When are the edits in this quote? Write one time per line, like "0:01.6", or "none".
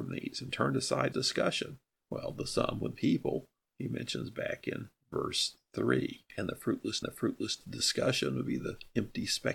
0:01.1
0:01.9
0:03.0
0:05.0
0:06.3
0:07.0